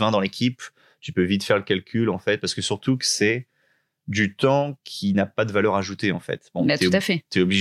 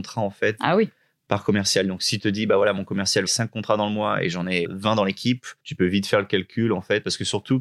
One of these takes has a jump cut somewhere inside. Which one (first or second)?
second